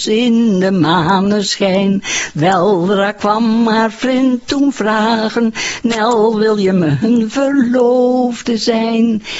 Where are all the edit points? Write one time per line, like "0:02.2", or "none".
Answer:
none